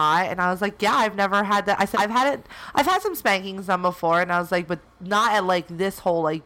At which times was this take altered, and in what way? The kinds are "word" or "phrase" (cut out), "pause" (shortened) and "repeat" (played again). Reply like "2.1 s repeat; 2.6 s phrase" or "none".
1.9 s word

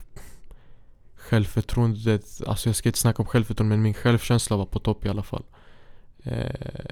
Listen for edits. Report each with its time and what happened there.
none

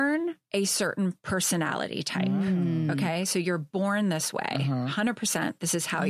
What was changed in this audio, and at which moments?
none

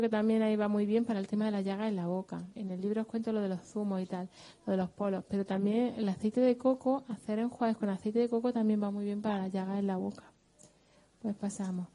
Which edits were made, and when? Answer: 2.5 s pause

